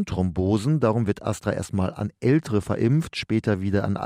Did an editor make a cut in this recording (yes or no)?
no